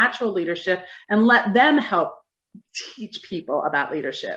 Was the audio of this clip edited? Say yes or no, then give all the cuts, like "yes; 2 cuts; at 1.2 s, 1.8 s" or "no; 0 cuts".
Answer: no; 0 cuts